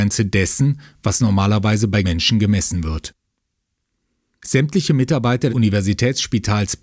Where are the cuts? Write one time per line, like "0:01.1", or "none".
0:02.0
0:05.5